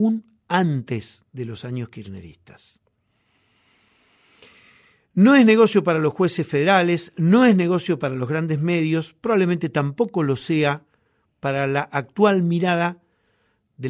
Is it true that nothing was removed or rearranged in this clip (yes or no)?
yes